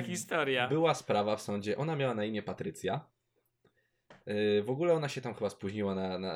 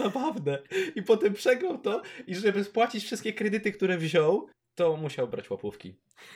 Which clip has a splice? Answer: second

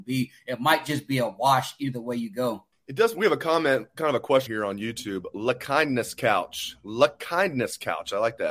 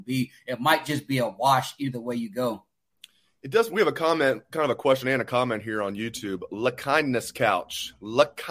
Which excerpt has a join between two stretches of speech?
first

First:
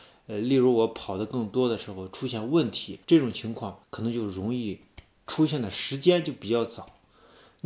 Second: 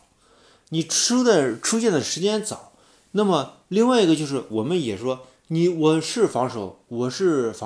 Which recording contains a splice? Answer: first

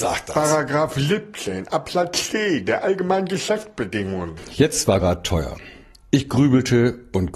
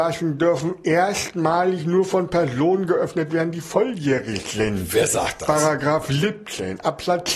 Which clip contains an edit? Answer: first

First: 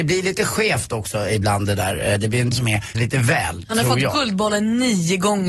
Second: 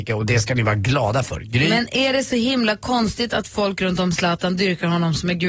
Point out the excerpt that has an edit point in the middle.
first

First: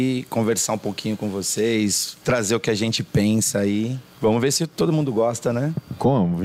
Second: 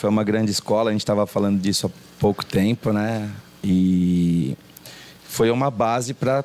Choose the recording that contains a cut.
first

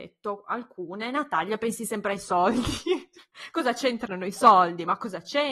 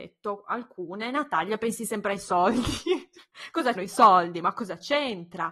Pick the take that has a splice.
second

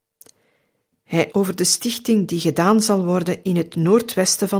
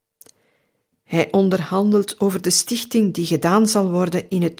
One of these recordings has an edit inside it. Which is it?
first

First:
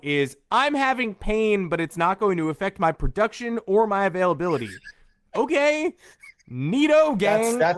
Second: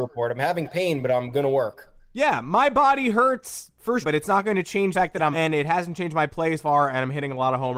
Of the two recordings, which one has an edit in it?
second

